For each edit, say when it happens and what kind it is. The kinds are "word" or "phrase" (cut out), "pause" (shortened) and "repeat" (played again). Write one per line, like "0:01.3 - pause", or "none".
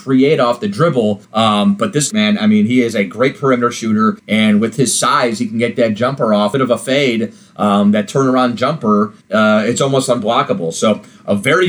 0:01.2 - pause
0:02.1 - phrase
0:04.2 - pause
0:06.5 - phrase
0:09.2 - pause